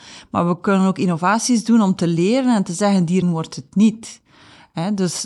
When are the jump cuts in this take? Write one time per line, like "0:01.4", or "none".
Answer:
0:03.2

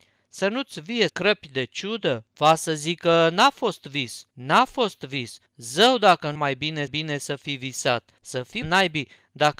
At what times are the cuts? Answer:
0:01.1
0:02.3
0:04.3
0:05.5
0:06.4
0:06.9
0:08.2
0:08.6

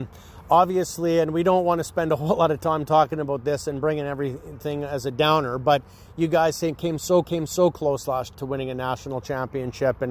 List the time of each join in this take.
0:07.2
0:08.3

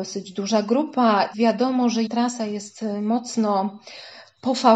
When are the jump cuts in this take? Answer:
0:01.3
0:02.1

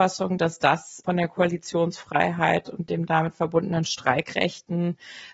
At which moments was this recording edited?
none

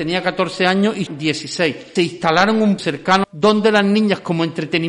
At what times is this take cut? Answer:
0:01.1
0:02.0
0:02.8
0:03.2

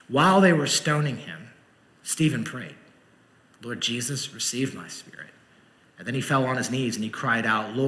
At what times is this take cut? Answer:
none

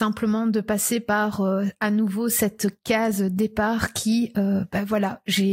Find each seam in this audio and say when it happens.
none

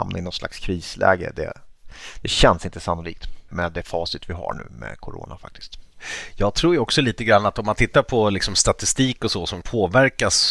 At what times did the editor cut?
0:03.5
0:09.6

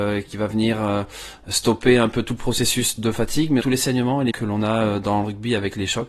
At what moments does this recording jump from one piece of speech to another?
0:03.6
0:04.3

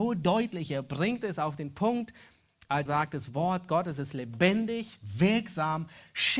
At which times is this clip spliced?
0:02.9

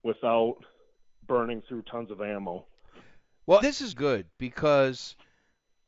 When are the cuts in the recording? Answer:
0:03.6
0:03.9

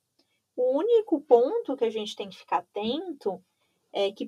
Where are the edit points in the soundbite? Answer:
none

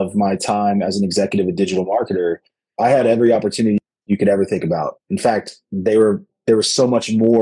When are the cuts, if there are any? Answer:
none

